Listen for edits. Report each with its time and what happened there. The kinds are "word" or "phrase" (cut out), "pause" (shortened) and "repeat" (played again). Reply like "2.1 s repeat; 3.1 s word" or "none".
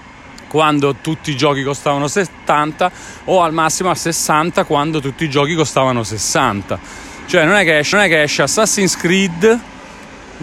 7.9 s repeat